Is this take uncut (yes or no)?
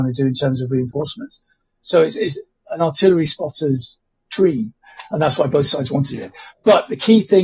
yes